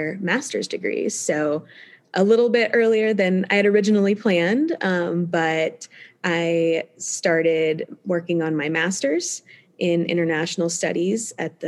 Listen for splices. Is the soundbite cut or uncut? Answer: uncut